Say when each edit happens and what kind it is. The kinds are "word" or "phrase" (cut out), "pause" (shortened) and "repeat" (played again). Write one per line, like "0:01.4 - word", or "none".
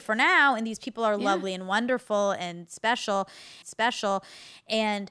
0:03.6 - repeat